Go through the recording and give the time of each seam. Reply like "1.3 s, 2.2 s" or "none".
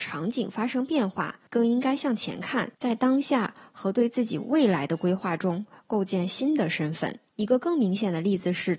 1.5 s, 2.7 s, 7.3 s